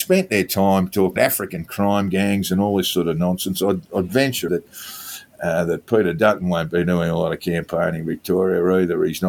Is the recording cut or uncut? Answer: cut